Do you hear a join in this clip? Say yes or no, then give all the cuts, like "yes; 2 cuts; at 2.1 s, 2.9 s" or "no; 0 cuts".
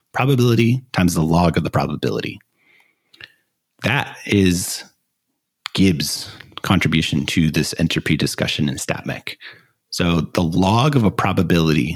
no; 0 cuts